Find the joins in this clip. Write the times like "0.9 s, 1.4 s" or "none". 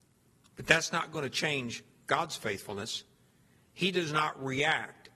none